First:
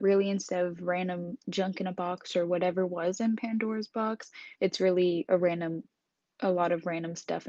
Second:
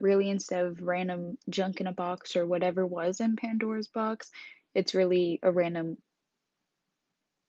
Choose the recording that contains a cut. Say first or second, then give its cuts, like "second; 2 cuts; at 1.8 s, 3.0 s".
first; 2 cuts; at 4.5 s, 6.2 s